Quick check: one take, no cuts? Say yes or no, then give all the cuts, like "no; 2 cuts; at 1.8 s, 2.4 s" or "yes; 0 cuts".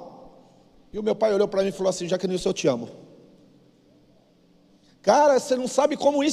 yes; 0 cuts